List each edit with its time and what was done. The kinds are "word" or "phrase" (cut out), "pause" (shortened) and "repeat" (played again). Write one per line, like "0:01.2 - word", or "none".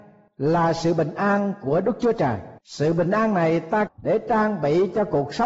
0:02.6 - pause
0:03.9 - phrase